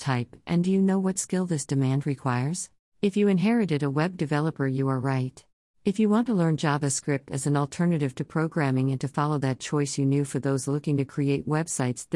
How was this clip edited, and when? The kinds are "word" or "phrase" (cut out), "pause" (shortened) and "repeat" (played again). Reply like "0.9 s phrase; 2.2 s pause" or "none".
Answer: 2.8 s pause; 5.5 s pause